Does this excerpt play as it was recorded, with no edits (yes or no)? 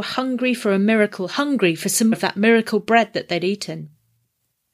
no